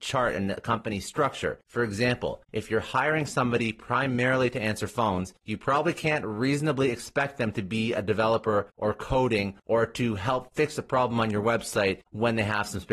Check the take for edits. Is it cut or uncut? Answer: uncut